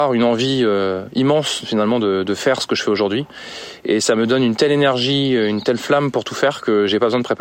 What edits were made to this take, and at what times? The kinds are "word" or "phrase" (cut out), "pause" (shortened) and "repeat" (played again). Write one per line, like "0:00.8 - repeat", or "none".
none